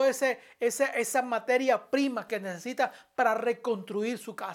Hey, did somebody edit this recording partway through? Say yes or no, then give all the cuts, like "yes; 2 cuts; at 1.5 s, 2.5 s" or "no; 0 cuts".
no; 0 cuts